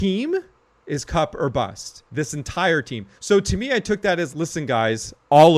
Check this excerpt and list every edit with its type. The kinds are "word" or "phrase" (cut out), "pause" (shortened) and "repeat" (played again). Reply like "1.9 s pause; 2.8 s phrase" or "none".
2.1 s pause; 3.1 s pause; 4.3 s word